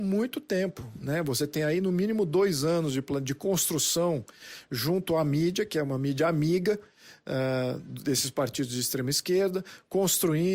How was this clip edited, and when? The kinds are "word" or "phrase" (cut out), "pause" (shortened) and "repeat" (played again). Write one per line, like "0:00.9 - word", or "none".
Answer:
none